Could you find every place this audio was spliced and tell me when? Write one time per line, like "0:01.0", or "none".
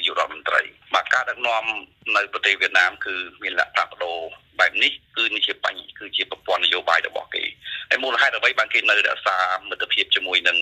0:05.1